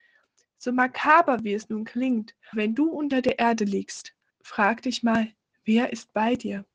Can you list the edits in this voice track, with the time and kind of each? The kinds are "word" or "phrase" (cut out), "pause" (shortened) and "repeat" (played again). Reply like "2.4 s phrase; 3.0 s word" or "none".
2.5 s word; 4.3 s pause